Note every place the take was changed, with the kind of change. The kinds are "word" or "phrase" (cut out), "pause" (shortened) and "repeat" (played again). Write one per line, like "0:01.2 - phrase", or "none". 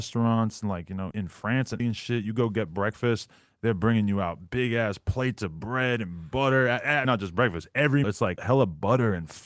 0:01.1 - word
0:01.8 - word
0:07.0 - word
0:08.0 - word
0:08.4 - word